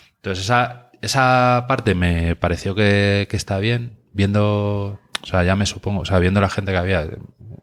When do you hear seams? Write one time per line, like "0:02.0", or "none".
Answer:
none